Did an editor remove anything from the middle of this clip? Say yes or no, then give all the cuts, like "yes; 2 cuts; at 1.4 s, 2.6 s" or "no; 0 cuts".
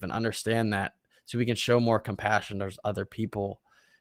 no; 0 cuts